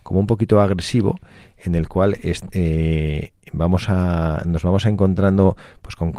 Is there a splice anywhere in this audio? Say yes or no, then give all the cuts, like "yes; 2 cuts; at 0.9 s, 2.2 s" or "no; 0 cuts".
no; 0 cuts